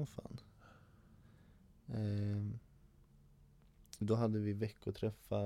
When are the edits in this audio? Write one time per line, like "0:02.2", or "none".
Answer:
0:04.0